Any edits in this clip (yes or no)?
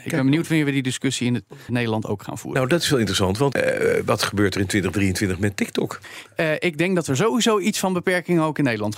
yes